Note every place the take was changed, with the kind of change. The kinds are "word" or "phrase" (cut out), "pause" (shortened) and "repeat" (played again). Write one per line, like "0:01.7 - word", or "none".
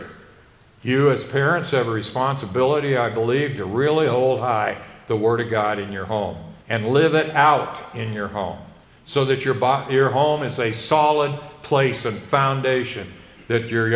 0:06.6 - pause
0:08.8 - pause

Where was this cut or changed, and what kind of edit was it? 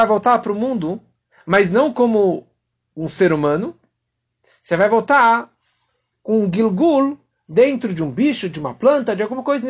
none

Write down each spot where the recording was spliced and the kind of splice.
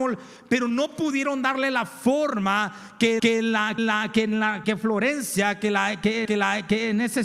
0:03.2 - repeat
0:03.8 - repeat
0:04.6 - word
0:06.3 - repeat

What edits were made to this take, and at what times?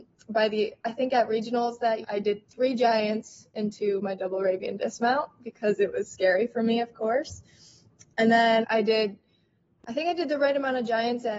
0:02.0 - word
0:08.6 - word

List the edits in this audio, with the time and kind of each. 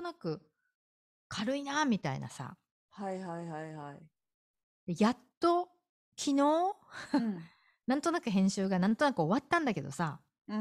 none

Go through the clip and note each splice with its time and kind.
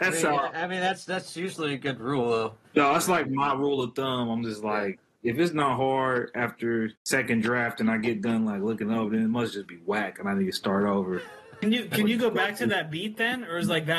0:02.6 - pause
0:07.0 - pause

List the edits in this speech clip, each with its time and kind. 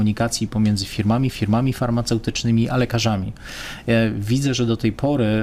0:01.3 - repeat

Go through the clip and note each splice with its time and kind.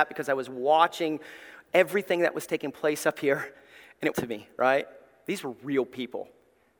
0:04.1 - phrase

